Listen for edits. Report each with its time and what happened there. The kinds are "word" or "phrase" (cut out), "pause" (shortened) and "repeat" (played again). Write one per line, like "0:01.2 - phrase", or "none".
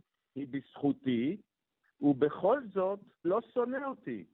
0:03.2 - word